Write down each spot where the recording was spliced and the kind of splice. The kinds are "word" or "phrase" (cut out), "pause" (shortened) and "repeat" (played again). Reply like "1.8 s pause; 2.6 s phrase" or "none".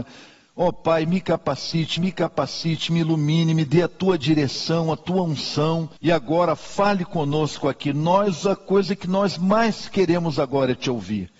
2.0 s repeat; 6.0 s pause